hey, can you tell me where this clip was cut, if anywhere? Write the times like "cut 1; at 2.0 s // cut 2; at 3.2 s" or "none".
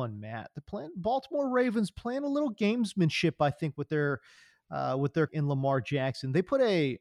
cut 1; at 5.3 s